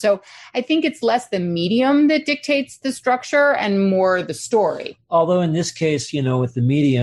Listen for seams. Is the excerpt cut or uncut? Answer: uncut